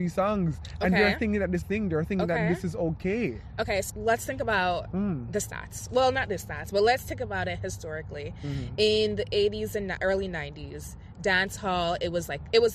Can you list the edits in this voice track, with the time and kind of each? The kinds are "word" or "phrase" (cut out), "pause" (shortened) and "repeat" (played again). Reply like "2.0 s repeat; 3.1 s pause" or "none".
1.6 s phrase; 3.9 s word